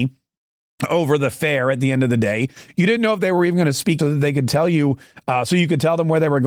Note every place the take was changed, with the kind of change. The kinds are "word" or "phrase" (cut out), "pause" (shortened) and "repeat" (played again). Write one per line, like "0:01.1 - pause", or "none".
0:04.0 - word

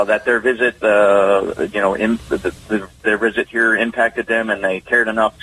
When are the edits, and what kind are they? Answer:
none

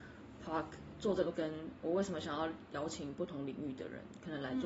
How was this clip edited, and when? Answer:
0:01.3 - word

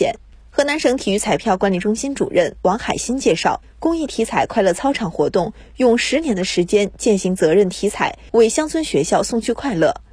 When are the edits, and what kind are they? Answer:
0:08.3 - pause

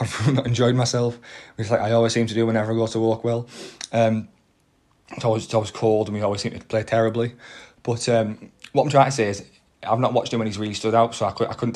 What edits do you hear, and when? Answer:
none

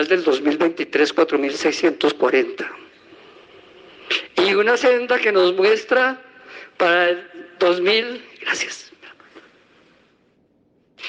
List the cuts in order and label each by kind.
none

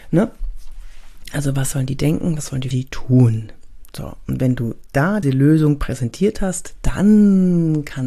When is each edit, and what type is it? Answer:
0:02.7 - phrase
0:05.2 - word

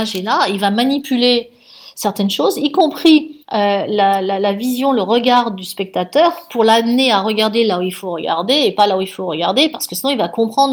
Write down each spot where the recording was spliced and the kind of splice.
0:03.4 - pause

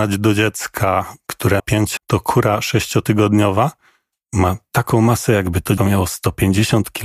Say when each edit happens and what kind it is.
0:01.6 - word
0:02.0 - word
0:05.8 - word

